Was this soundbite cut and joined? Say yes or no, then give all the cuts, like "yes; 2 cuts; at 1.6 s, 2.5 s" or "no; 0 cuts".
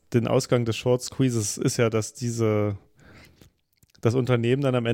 no; 0 cuts